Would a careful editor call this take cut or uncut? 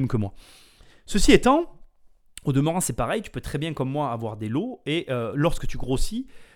uncut